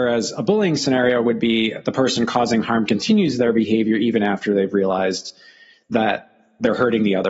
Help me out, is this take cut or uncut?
uncut